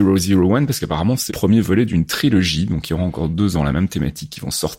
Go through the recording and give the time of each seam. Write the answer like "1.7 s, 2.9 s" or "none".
1.3 s, 3.5 s